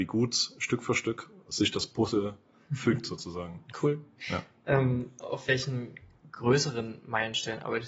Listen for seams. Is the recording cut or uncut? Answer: uncut